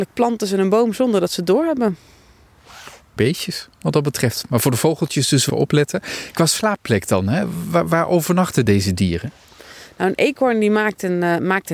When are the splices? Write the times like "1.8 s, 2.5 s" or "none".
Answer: 3.2 s, 5.5 s, 8.7 s